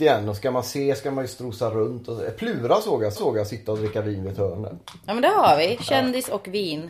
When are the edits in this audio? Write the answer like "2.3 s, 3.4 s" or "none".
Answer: 3.2 s